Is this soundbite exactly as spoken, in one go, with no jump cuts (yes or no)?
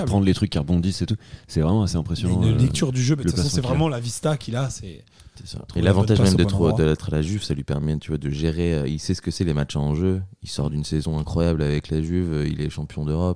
yes